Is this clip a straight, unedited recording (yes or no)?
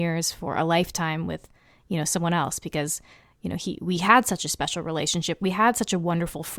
yes